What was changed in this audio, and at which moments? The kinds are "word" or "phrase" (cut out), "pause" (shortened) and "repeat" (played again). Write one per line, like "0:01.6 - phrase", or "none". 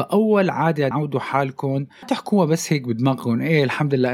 0:00.9 - word
0:02.0 - word